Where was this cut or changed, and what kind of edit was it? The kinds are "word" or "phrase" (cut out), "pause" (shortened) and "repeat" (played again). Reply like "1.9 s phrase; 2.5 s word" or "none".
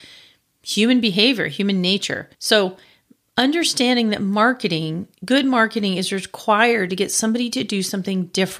2.3 s pause; 5.1 s pause